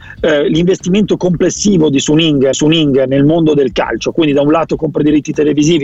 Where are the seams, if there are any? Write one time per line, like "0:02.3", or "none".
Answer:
0:02.5

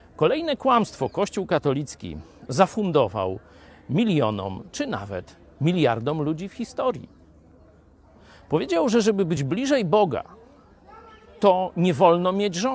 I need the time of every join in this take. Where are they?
none

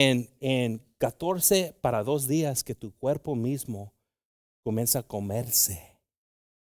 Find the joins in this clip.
none

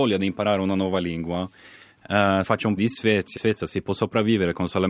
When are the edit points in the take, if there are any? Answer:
0:02.4
0:02.8
0:03.4

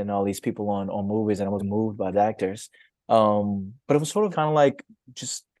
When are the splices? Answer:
0:01.6
0:02.1
0:04.3

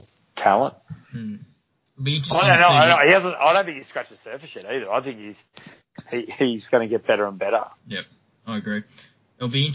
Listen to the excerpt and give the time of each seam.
0:01.0
0:07.8

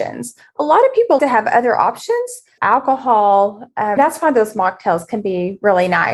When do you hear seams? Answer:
0:01.2
0:02.6
0:04.0

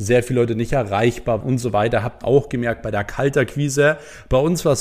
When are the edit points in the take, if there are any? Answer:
0:01.4
0:02.2

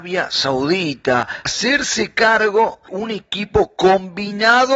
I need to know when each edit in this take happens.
0:01.5
0:02.9

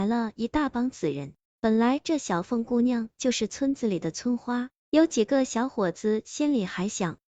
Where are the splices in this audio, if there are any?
none

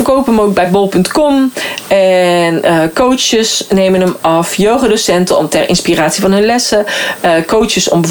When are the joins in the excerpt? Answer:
none

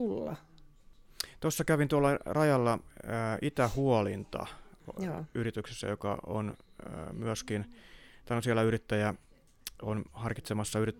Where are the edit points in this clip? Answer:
none

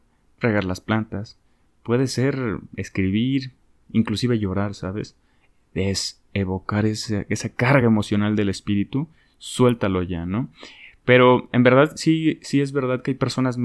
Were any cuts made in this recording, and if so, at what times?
none

